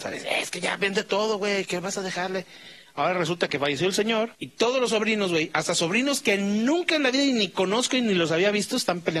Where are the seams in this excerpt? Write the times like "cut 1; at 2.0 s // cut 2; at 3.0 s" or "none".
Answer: cut 1; at 4.3 s

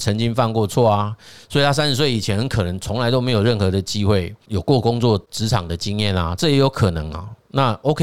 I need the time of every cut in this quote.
none

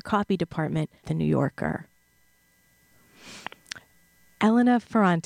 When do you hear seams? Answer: cut 1; at 1.0 s

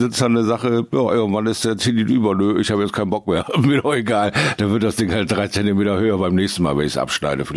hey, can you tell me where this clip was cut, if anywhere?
none

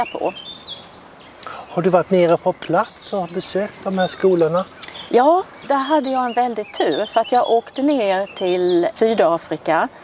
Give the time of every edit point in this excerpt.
none

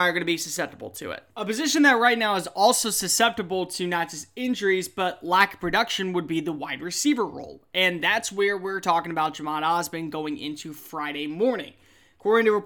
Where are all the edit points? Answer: cut 1; at 1.3 s

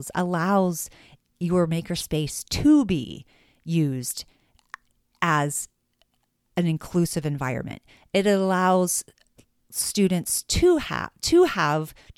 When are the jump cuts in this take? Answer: none

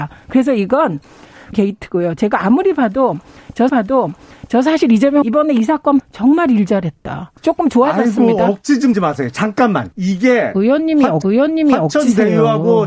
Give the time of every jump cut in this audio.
cut 1; at 1.5 s // cut 2; at 3.7 s // cut 3; at 5.2 s // cut 4; at 6.0 s // cut 5; at 7.4 s // cut 6; at 8.9 s // cut 7; at 9.9 s // cut 8; at 11.2 s

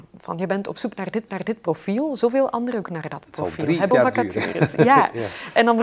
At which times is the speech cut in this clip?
cut 1; at 1.3 s // cut 2; at 2.8 s // cut 3; at 3.9 s

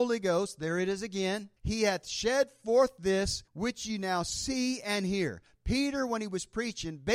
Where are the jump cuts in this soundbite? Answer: cut 1; at 1.6 s // cut 2; at 3.5 s

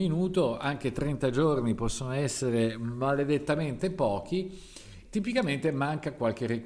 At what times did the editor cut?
cut 1; at 5.0 s

